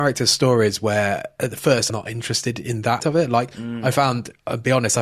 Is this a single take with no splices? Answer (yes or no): no